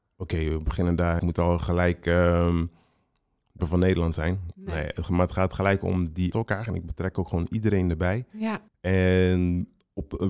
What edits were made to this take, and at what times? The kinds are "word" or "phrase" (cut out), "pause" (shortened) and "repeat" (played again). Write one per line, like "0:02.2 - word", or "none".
0:01.2 - word
0:03.6 - phrase
0:06.3 - phrase
0:08.7 - pause